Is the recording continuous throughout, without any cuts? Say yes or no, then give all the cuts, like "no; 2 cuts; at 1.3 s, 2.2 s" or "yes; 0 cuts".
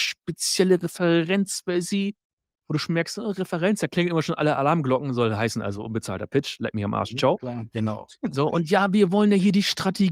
yes; 0 cuts